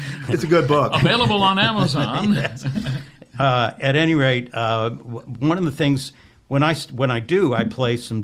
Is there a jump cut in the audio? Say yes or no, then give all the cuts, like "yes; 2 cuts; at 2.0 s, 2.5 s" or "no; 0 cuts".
no; 0 cuts